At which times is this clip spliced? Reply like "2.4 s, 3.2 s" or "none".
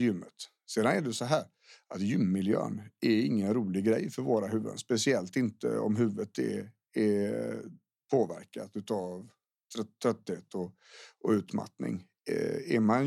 none